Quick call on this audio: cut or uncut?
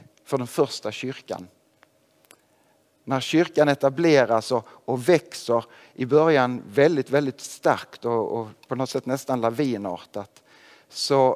uncut